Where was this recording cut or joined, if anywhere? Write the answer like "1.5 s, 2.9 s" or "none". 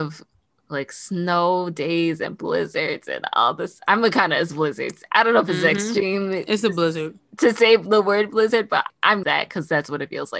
8.9 s, 9.2 s